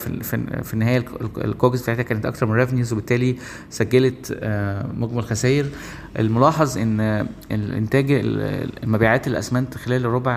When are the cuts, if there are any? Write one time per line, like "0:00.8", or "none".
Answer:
none

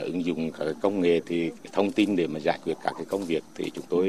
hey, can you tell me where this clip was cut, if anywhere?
0:01.6

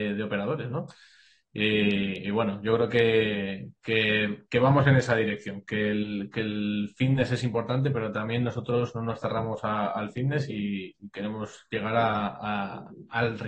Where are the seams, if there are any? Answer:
none

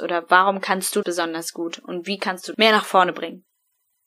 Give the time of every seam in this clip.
0:01.0
0:02.5

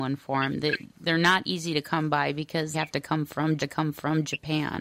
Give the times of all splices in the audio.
0:02.7
0:03.6

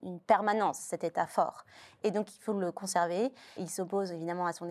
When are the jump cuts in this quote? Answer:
0:03.6

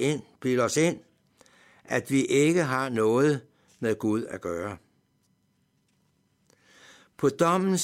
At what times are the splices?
none

